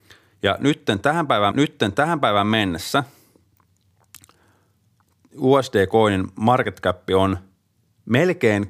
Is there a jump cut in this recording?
yes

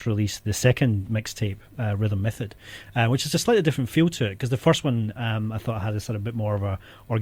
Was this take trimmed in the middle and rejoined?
no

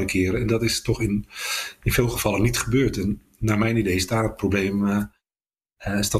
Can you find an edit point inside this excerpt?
no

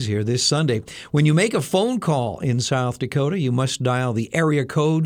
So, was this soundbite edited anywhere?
no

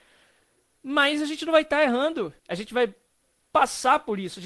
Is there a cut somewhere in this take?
yes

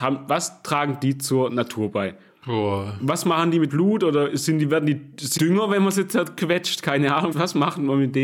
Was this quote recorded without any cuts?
no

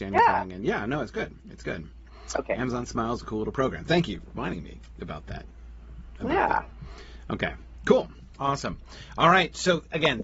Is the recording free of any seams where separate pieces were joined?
no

